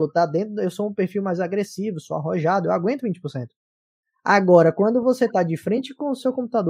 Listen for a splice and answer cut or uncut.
uncut